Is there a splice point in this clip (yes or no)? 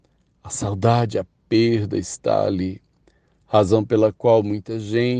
no